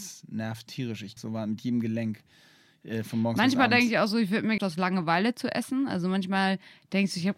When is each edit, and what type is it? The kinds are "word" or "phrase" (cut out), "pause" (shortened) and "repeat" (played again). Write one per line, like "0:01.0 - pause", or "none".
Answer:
0:01.2 - word
0:04.6 - phrase